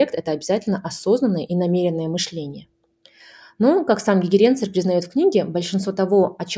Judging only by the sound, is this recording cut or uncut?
uncut